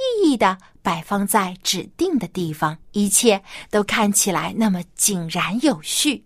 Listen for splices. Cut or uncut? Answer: cut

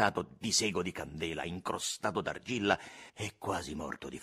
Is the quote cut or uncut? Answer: cut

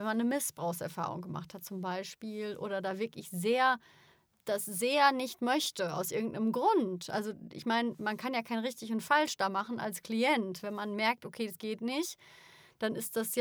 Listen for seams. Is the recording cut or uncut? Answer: uncut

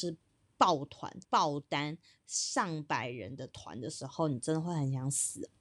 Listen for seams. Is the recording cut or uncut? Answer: cut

